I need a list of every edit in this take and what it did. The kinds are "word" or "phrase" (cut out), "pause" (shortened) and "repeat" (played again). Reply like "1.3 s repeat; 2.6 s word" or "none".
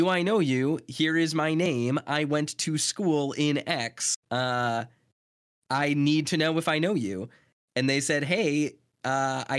4.2 s pause